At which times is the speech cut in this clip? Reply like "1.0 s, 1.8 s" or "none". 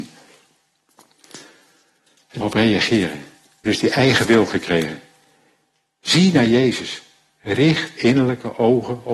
2.4 s, 3.7 s, 4.2 s, 8.0 s